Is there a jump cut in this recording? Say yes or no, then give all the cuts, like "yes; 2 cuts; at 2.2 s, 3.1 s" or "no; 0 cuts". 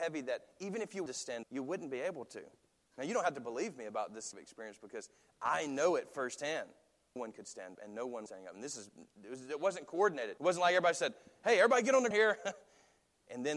yes; 8 cuts; at 1.1 s, 1.4 s, 4.3 s, 7.2 s, 7.7 s, 8.3 s, 10.4 s, 12.1 s